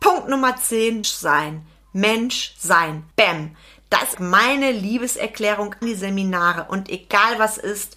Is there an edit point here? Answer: yes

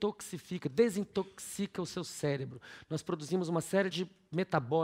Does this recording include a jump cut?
no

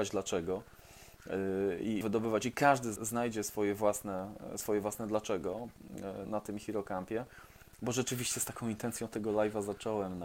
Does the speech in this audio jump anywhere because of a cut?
yes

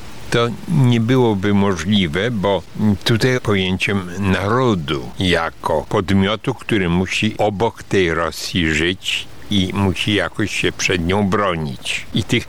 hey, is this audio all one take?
no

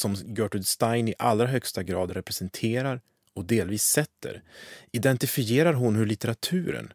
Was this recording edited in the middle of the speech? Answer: no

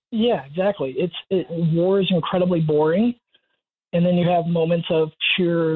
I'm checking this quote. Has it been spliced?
no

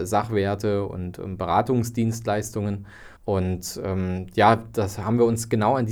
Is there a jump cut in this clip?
yes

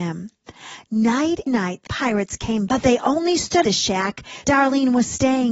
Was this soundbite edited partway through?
yes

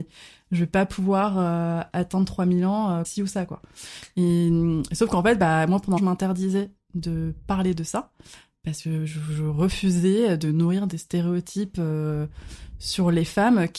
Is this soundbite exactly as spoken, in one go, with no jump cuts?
no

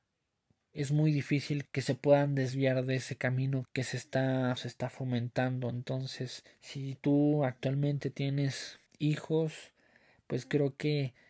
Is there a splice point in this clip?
yes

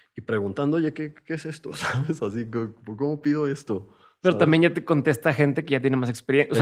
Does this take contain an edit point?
no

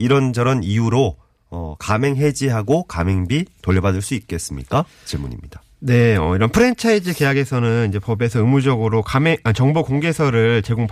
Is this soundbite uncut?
yes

